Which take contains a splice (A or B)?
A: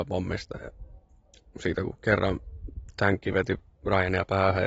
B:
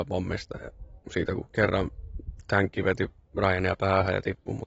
B